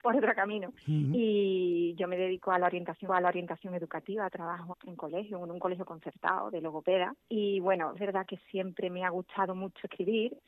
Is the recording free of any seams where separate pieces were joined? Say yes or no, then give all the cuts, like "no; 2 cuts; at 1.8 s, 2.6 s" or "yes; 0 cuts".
no; 4 cuts; at 3.1 s, 4.7 s, 7.2 s, 7.9 s